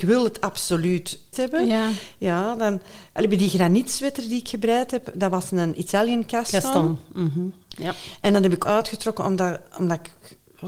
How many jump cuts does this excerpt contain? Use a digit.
2